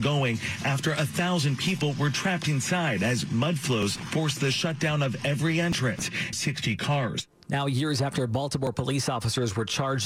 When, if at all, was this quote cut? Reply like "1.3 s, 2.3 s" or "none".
6.3 s